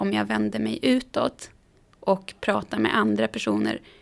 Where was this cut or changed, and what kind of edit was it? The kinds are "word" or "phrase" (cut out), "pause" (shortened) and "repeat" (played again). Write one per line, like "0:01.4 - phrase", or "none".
none